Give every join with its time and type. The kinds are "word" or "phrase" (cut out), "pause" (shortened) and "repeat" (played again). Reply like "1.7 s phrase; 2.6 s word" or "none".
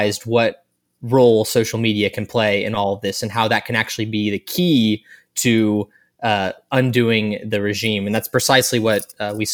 none